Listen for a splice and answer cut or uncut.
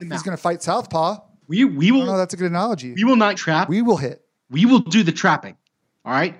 cut